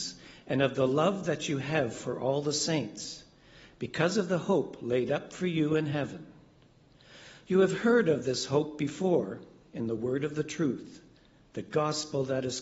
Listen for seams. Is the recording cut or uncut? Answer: uncut